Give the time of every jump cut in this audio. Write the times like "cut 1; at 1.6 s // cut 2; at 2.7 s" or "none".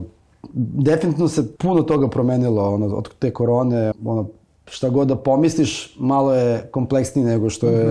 cut 1; at 1.6 s // cut 2; at 3.9 s